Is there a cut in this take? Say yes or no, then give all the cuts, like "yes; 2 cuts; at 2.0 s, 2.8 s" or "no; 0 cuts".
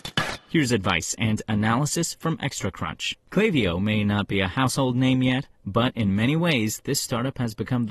no; 0 cuts